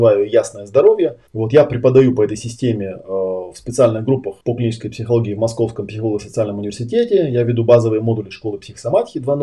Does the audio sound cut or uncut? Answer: cut